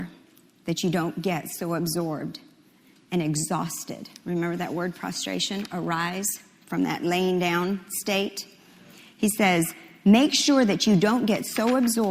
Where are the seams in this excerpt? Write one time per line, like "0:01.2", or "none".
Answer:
none